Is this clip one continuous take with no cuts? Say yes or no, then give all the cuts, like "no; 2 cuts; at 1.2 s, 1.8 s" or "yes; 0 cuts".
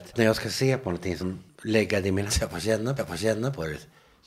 no; 3 cuts; at 1.2 s, 2.3 s, 3.0 s